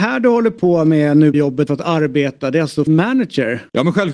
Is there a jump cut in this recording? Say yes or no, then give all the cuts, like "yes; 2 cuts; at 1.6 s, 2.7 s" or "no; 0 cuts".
yes; 3 cuts; at 1.3 s, 1.7 s, 2.9 s